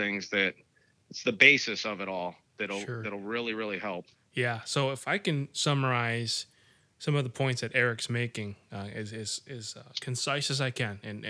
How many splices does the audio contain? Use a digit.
0